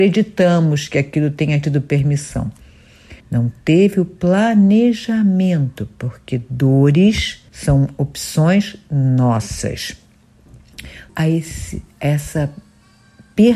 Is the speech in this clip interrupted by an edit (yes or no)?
yes